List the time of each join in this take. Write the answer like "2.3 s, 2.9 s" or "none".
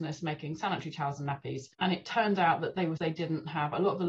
1.7 s, 3.0 s